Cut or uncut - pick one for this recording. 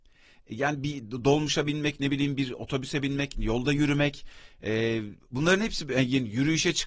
uncut